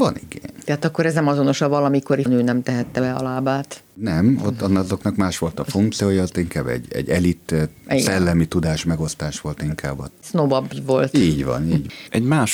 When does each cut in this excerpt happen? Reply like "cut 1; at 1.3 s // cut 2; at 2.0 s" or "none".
cut 1; at 2.3 s // cut 2; at 3.9 s

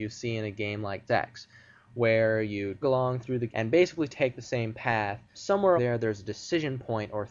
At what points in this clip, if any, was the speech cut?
cut 1; at 1.1 s // cut 2; at 2.8 s // cut 3; at 3.5 s // cut 4; at 5.3 s // cut 5; at 5.8 s

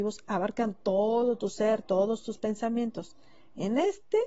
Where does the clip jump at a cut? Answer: none

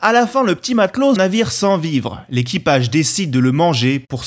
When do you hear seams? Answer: cut 1; at 1.2 s

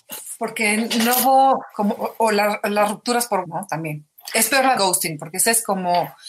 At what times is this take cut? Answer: cut 1; at 3.4 s // cut 2; at 4.8 s

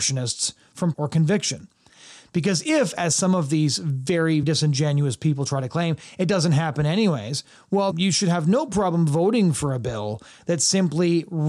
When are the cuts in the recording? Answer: cut 1; at 0.9 s // cut 2; at 4.4 s // cut 3; at 7.9 s

